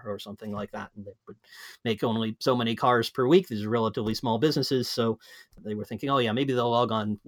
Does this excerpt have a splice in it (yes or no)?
yes